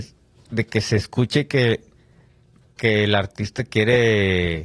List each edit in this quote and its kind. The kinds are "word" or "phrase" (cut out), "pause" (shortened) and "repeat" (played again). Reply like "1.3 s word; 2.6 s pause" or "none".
none

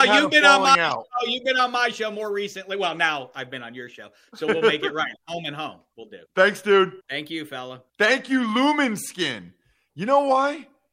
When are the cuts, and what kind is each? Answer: 6.3 s pause; 7.0 s pause; 7.9 s pause

